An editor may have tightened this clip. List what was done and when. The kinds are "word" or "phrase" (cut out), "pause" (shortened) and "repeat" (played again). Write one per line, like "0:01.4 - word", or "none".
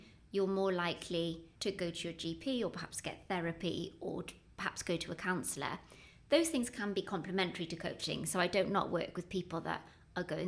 0:01.6 - pause